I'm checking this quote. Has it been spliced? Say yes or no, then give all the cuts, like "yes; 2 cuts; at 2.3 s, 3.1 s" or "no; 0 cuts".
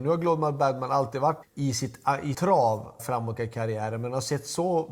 yes; 4 cuts; at 1.4 s, 2.3 s, 3.0 s, 3.4 s